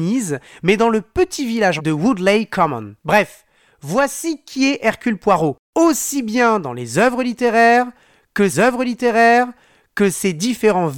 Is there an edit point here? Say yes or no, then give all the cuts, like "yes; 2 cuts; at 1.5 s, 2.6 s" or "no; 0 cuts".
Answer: yes; 4 cuts; at 1.8 s, 3.0 s, 5.6 s, 8.5 s